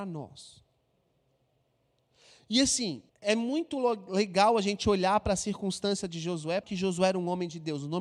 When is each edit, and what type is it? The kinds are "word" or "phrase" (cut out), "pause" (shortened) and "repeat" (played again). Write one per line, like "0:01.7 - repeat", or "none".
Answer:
0:03.1 - pause
0:06.6 - phrase